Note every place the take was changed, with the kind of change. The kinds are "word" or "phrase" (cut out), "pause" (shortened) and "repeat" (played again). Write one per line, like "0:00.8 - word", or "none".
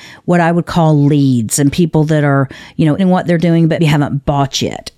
0:03.0 - word
0:03.8 - word